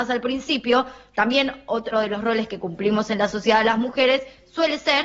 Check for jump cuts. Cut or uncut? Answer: cut